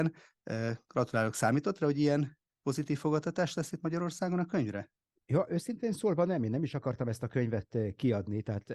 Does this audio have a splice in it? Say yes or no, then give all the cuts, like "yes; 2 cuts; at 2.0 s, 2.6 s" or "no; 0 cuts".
no; 0 cuts